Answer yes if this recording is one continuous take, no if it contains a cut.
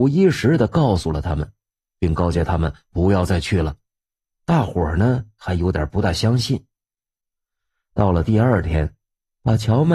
yes